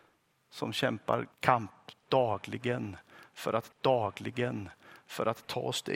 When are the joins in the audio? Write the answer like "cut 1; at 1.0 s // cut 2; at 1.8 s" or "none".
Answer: cut 1; at 1.3 s // cut 2; at 3.7 s